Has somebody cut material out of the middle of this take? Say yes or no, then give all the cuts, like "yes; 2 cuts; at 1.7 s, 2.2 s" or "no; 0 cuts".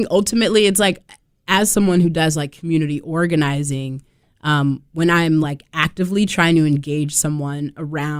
no; 0 cuts